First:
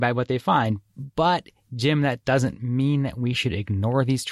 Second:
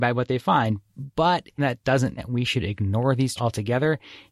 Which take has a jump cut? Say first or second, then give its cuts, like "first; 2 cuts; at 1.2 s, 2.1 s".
second; 3 cuts; at 1.6 s, 2.2 s, 3.4 s